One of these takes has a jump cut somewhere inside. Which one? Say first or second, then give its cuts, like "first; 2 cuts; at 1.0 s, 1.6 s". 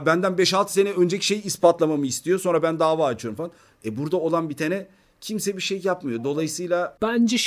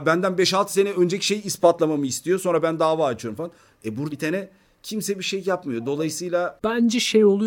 second; 1 cut; at 4.1 s